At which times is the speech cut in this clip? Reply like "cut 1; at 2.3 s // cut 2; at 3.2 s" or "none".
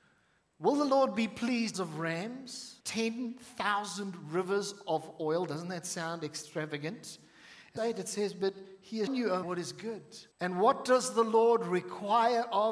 cut 1; at 1.7 s // cut 2; at 2.8 s // cut 3; at 7.8 s // cut 4; at 9.1 s // cut 5; at 9.4 s // cut 6; at 10.3 s